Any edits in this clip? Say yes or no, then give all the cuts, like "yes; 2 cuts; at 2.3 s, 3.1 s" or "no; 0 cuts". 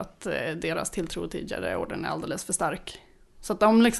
no; 0 cuts